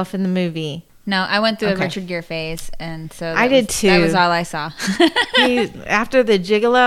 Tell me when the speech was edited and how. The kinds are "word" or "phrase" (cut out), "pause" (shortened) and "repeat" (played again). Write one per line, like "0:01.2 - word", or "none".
none